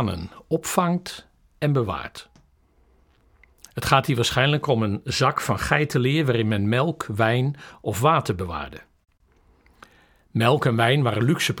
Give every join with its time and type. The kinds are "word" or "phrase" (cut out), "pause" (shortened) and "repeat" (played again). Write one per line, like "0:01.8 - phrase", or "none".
none